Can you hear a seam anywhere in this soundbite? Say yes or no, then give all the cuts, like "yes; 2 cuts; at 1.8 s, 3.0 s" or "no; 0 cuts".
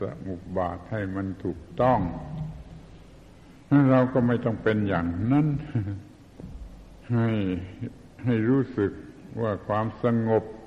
yes; 1 cut; at 7.0 s